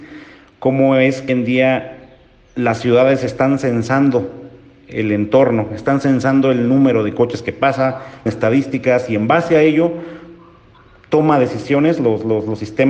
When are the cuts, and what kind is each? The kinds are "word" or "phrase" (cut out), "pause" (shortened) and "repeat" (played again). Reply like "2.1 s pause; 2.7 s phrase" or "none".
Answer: 1.3 s word; 8.3 s word